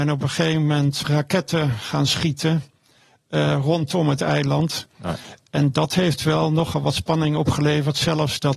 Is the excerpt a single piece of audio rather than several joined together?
no; 1 cut; at 1.0 s

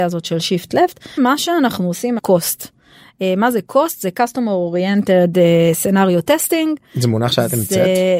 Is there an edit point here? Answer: yes; 2 cuts; at 1.2 s, 2.2 s

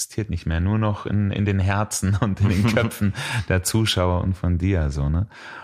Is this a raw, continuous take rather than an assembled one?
yes; 0 cuts

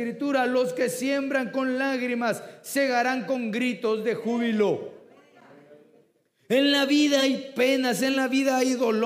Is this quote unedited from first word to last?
yes; 0 cuts

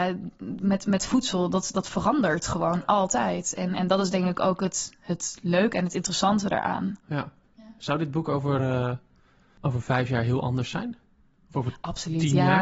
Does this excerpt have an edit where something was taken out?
no; 0 cuts

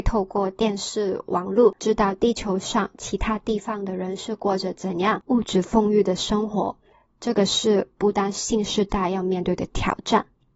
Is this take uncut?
yes; 0 cuts

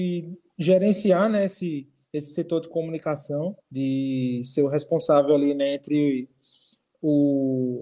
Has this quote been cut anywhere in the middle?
yes; 2 cuts; at 2.0 s, 3.6 s

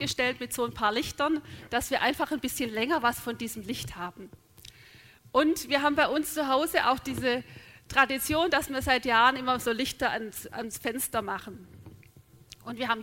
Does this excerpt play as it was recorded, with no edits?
yes; 0 cuts

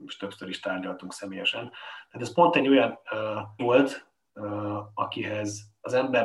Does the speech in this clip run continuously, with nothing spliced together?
no; 1 cut; at 3.6 s

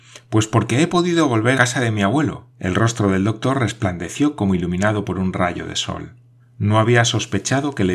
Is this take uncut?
no; 3 cuts; at 1.5 s, 2.5 s, 6.4 s

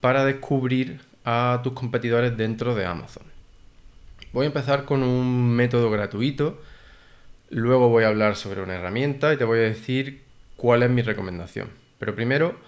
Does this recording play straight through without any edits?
yes; 0 cuts

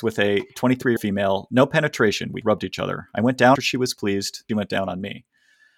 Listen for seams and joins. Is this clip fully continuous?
no; 4 cuts; at 1.0 s, 2.4 s, 3.6 s, 4.5 s

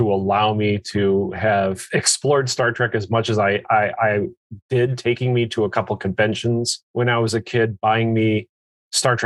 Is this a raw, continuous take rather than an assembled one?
no; 1 cut; at 6.8 s

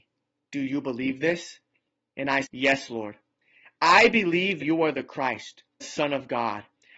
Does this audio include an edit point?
yes; 3 cuts; at 2.4 s, 4.6 s, 5.8 s

